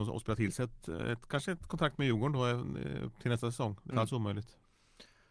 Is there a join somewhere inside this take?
yes; 1 cut; at 3.9 s

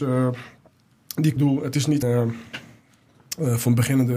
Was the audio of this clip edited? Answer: yes; 2 cuts; at 1.4 s, 2.0 s

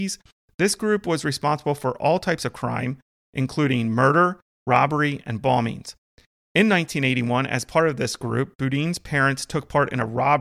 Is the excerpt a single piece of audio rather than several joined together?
yes; 0 cuts

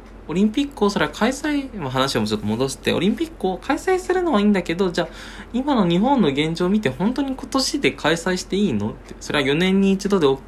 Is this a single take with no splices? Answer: yes; 0 cuts

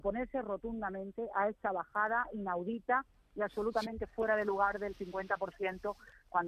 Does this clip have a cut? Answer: no; 0 cuts

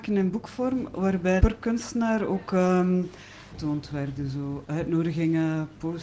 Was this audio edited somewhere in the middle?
yes; 3 cuts; at 1.4 s, 3.5 s, 4.7 s

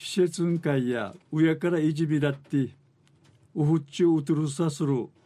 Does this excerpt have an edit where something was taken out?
yes; 1 cut; at 1.2 s

